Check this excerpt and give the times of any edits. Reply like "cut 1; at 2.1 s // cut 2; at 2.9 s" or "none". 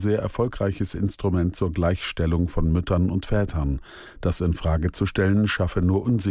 none